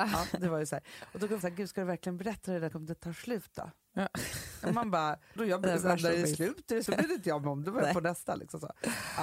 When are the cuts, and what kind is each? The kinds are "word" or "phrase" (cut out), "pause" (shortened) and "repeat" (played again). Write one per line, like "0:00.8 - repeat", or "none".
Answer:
0:01.4 - word
0:02.7 - word
0:05.4 - word
0:06.9 - word
0:07.6 - word